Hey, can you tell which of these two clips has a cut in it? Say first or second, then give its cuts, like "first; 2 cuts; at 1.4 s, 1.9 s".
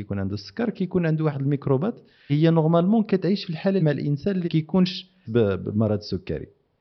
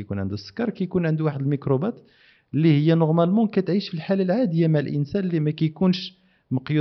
first; 4 cuts; at 2.3 s, 3.8 s, 4.4 s, 5.2 s